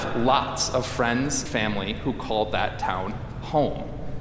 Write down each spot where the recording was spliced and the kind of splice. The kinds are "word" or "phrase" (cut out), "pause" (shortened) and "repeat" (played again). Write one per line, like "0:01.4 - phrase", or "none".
0:01.5 - word